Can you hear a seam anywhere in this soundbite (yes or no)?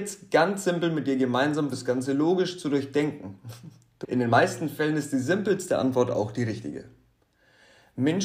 yes